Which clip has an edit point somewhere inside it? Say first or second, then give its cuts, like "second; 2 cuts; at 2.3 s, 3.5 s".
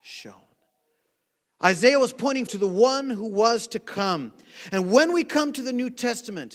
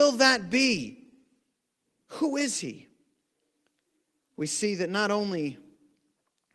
first; 1 cut; at 2.5 s